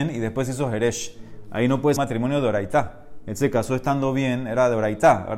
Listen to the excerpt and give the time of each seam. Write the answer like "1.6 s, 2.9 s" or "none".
2.0 s